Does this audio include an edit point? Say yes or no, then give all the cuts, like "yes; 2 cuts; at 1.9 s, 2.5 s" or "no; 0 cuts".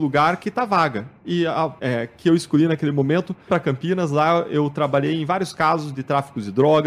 yes; 2 cuts; at 1.8 s, 3.5 s